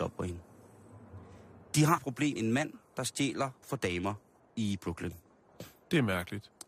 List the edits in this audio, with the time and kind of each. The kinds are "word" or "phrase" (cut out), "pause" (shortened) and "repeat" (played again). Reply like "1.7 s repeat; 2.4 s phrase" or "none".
2.0 s word; 2.4 s word; 3.6 s phrase; 4.4 s pause